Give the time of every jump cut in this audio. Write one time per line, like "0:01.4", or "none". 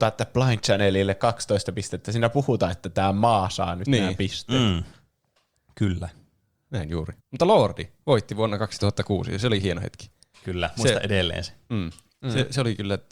0:07.2